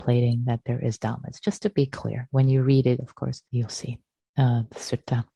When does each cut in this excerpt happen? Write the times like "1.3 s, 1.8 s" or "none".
3.5 s